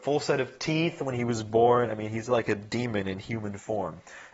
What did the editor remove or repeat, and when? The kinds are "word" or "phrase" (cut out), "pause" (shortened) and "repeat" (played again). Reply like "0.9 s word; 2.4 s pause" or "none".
none